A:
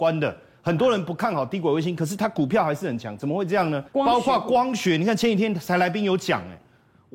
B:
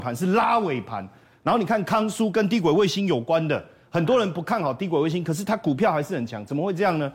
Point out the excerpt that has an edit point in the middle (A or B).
A